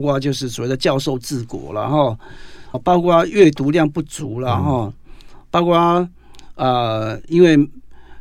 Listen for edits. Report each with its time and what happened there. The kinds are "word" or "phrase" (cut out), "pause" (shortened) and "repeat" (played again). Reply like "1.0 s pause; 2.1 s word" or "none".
2.7 s word